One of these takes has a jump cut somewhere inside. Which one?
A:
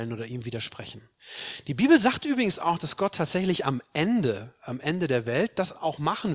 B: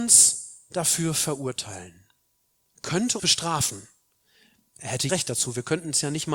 B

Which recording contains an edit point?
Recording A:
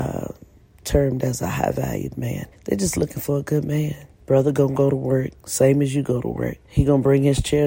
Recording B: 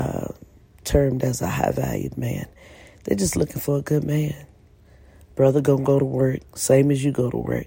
A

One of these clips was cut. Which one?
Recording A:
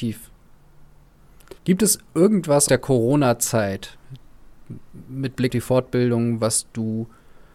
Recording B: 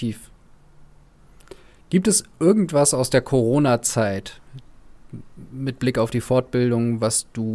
A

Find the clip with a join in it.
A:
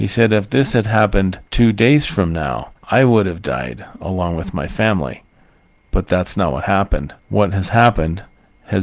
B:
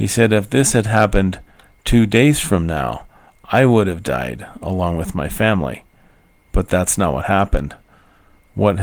A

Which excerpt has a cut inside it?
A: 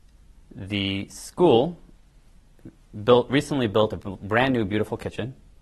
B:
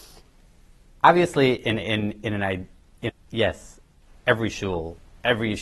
B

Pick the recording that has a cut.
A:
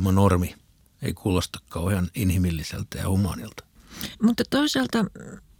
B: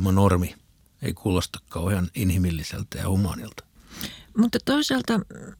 A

